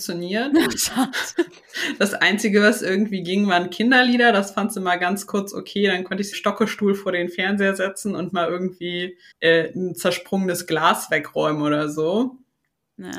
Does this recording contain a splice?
yes; 2 cuts; at 6.3 s, 9.3 s

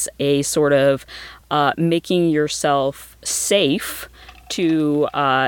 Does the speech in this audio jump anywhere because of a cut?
no; 0 cuts

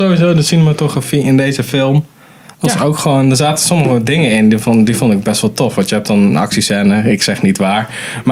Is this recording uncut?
yes; 0 cuts

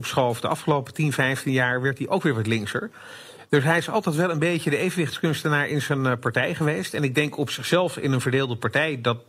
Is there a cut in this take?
no; 0 cuts

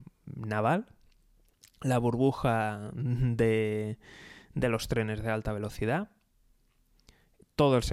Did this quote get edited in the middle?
no; 0 cuts

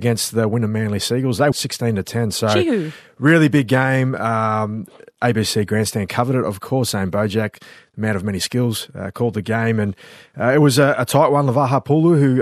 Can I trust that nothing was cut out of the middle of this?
no; 1 cut; at 1.5 s

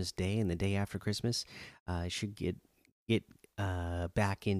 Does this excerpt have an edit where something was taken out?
no; 0 cuts

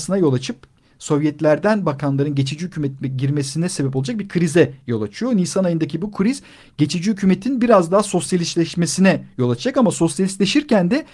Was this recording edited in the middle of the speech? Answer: no; 0 cuts

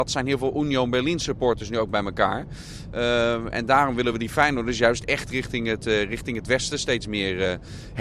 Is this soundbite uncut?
yes; 0 cuts

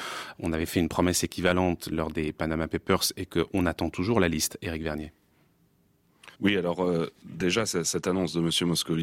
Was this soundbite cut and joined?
yes; 1 cut; at 6.3 s

